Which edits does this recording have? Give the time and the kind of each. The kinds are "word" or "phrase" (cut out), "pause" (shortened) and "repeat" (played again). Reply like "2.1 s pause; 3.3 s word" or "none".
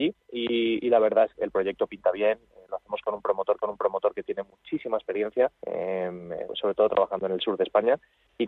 1.3 s word; 3.6 s repeat; 5.6 s pause